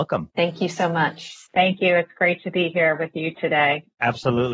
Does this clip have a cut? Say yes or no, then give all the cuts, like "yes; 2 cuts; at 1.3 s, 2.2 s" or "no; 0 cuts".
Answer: no; 0 cuts